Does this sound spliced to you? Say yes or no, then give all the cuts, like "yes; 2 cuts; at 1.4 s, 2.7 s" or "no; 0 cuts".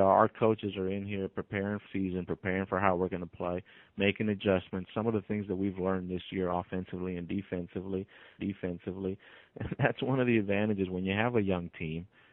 yes; 2 cuts; at 1.9 s, 8.4 s